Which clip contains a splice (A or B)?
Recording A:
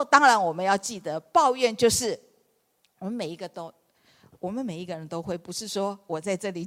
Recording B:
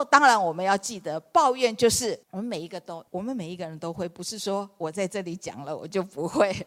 B